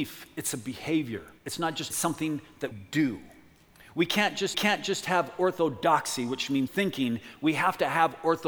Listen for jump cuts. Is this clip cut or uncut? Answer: cut